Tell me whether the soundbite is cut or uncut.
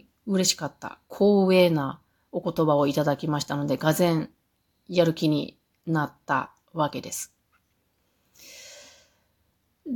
uncut